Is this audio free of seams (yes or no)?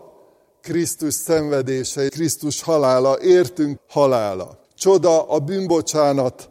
no